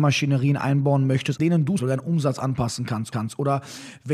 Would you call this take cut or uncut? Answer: cut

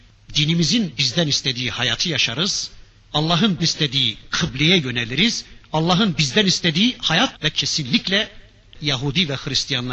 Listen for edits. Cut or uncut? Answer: cut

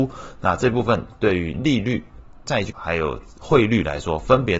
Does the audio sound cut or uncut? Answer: cut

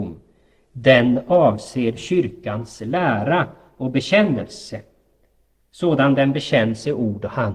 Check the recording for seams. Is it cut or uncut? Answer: uncut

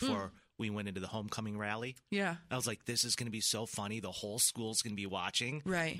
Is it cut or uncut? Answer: uncut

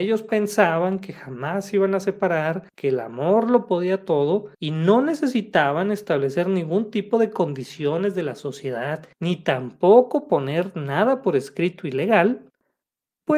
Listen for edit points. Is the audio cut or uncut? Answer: cut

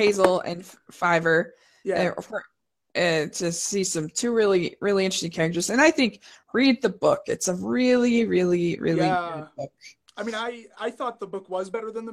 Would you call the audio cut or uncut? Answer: uncut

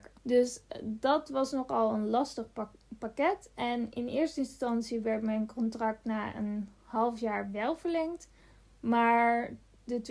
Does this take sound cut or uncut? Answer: uncut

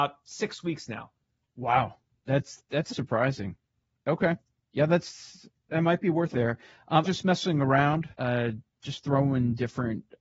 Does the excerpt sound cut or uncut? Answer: cut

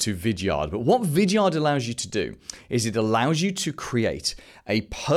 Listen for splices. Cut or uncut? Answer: uncut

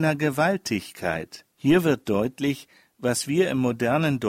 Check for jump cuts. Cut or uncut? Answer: cut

